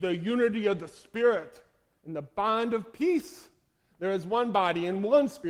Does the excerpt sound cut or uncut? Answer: uncut